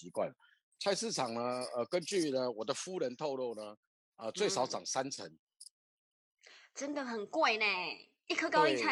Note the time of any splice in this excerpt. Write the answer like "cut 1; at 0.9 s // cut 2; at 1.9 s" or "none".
none